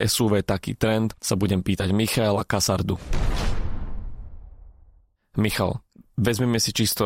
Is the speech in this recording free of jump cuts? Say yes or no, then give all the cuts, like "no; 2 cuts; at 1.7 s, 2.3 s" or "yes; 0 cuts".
yes; 0 cuts